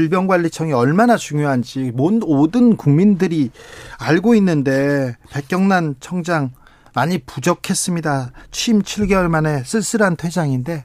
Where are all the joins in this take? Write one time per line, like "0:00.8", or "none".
none